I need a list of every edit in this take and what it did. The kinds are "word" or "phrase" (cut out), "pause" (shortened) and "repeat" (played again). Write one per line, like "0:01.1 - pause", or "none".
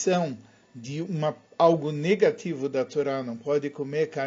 0:01.5 - pause